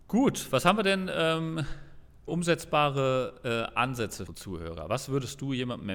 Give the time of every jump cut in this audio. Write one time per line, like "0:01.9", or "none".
0:02.3
0:04.3